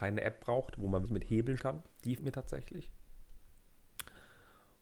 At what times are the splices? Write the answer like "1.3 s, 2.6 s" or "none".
1.0 s, 1.6 s, 2.2 s